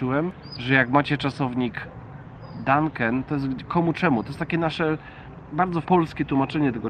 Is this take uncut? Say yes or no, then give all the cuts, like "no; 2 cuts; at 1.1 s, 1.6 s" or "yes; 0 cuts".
no; 1 cut; at 5.8 s